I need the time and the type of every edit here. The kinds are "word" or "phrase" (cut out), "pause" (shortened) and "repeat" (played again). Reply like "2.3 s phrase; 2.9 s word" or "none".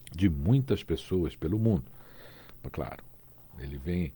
2.7 s phrase

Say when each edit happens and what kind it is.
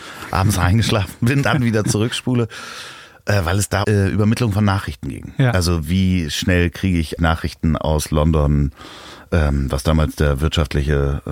1.4 s word; 3.8 s word; 7.2 s word

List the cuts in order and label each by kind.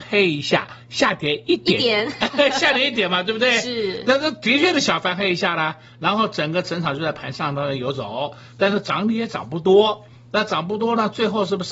none

